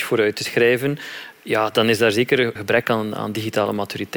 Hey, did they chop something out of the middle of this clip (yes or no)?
yes